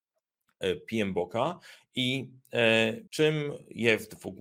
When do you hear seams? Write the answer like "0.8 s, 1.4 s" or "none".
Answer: 3.1 s